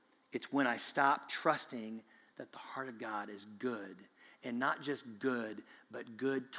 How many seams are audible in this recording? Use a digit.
0